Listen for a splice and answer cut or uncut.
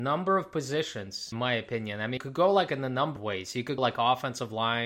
cut